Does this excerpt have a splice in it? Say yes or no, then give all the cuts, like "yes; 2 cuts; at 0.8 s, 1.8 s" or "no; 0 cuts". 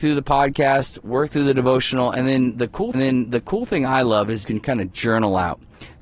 yes; 2 cuts; at 2.9 s, 4.4 s